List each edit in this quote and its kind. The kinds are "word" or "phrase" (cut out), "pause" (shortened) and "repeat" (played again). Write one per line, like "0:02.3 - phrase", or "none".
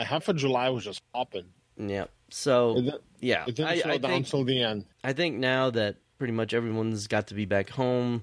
0:04.9 - pause